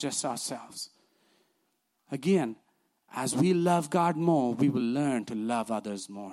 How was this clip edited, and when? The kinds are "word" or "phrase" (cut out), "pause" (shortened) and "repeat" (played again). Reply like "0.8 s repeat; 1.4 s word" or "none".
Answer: none